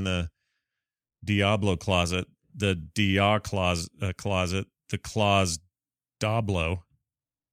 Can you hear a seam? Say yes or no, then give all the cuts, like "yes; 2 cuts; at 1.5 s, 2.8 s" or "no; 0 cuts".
no; 0 cuts